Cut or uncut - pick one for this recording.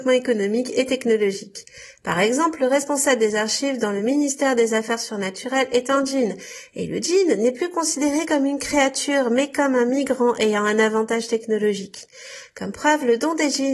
uncut